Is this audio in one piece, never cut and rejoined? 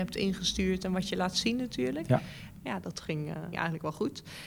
no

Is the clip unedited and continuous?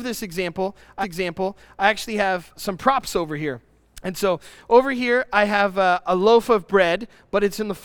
no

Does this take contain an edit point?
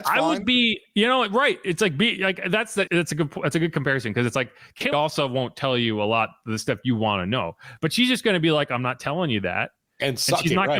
yes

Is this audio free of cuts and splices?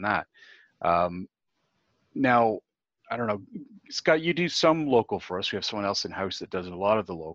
yes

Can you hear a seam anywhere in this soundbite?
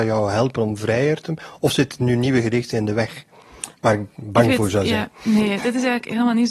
no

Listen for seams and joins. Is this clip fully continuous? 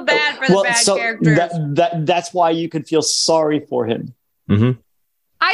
yes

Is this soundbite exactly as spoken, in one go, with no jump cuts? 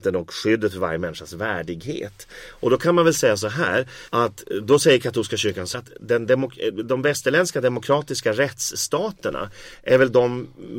no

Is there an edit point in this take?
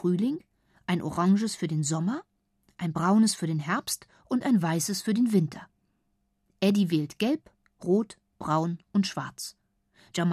no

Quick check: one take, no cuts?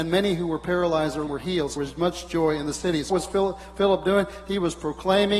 no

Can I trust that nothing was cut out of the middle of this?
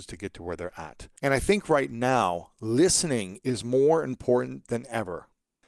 no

